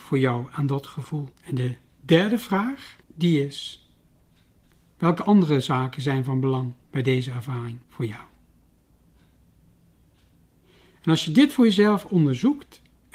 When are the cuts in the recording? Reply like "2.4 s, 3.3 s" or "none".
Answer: 1.3 s, 3.0 s, 4.6 s, 6.8 s, 7.8 s